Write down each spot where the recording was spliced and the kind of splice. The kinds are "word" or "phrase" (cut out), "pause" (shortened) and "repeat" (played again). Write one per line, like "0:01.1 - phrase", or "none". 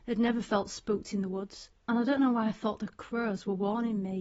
0:01.8 - pause

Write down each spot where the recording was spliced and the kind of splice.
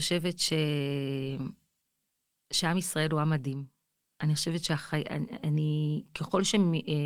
none

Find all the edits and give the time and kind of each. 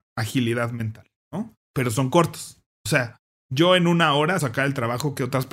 0:01.6 - pause
0:03.3 - pause
0:04.4 - phrase

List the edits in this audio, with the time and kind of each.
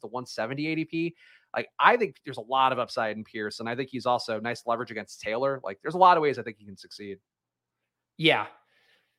none

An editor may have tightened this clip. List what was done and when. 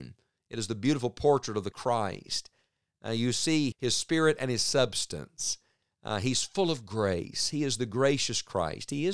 0:01.7 - word
0:03.7 - word

